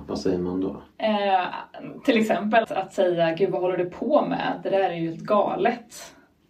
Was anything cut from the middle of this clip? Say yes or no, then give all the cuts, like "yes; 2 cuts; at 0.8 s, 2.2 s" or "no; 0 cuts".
yes; 2 cuts; at 0.9 s, 2.6 s